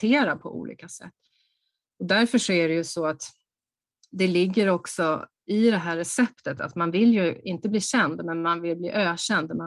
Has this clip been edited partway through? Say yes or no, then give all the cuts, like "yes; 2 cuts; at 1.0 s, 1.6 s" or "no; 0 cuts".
no; 0 cuts